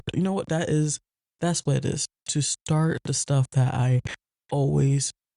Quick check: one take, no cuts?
yes; 0 cuts

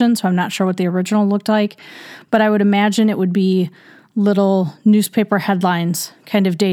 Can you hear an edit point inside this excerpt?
no; 0 cuts

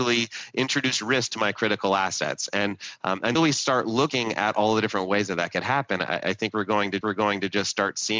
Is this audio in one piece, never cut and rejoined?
no; 2 cuts; at 3.4 s, 7.0 s

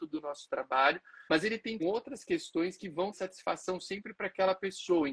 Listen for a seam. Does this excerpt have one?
yes; 3 cuts; at 1.3 s, 1.8 s, 3.1 s

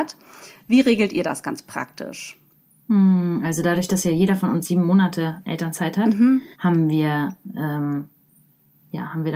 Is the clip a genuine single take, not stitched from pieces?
no; 2 cuts; at 2.6 s, 6.5 s

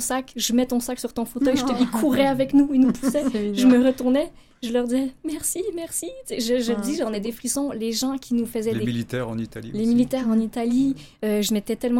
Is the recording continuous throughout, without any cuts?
yes; 0 cuts

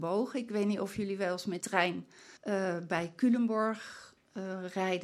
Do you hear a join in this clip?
yes; 2 cuts; at 1.6 s, 2.4 s

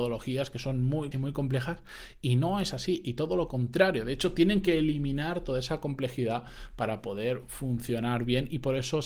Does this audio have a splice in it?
yes; 1 cut; at 1.1 s

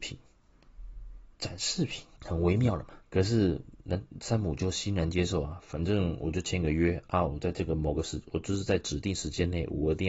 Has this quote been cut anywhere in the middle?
yes; 3 cuts; at 1.3 s, 2.1 s, 3.0 s

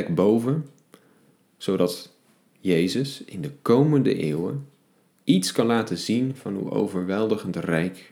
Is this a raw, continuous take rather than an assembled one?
yes; 0 cuts

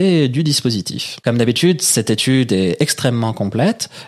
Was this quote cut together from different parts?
no; 0 cuts

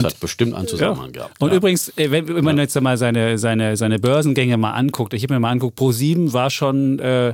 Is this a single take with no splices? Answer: yes; 0 cuts

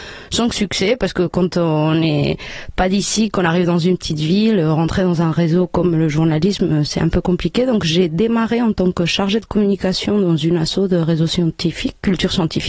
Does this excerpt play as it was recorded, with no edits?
yes; 0 cuts

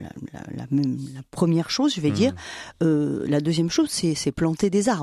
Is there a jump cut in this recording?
no; 0 cuts

